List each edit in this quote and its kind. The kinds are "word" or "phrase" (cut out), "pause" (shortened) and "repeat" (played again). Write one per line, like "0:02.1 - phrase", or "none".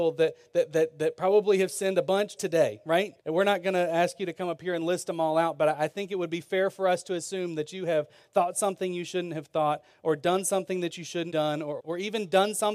0:02.4 - word
0:03.2 - pause
0:11.3 - word
0:11.8 - word